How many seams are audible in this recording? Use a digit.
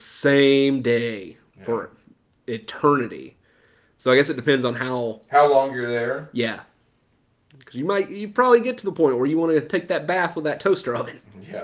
0